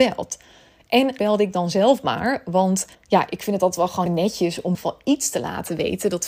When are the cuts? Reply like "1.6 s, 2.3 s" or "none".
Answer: 1.2 s, 2.9 s, 4.1 s, 4.7 s